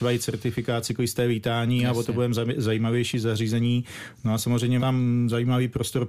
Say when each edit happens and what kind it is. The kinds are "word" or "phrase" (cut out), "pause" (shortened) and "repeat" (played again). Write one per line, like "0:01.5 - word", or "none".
0:04.8 - word